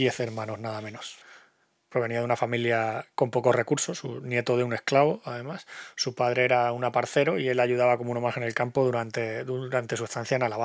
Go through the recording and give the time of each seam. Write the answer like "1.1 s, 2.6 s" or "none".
none